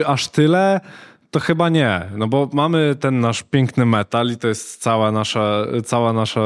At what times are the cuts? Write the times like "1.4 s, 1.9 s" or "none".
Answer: none